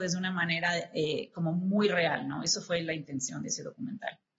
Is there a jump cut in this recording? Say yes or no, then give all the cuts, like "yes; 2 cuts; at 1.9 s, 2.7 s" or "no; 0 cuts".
no; 0 cuts